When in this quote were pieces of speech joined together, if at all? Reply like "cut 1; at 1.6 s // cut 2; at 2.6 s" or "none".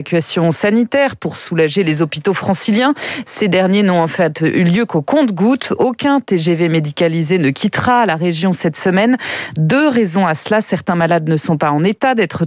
none